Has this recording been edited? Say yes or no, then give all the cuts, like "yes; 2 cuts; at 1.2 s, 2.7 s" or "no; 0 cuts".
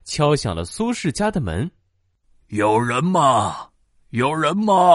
no; 0 cuts